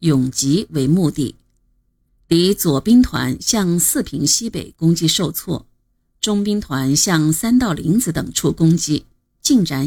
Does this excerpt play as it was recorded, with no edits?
yes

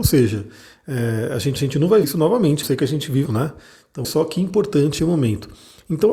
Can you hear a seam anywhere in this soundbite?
yes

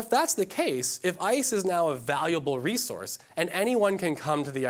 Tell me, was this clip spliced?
no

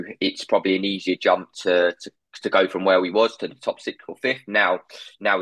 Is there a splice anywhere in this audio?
no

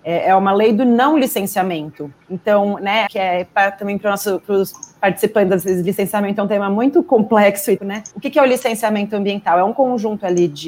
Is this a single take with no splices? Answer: no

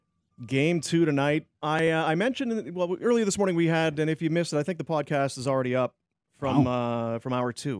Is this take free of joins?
no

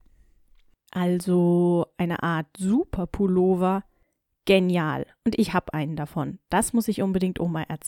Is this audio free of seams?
yes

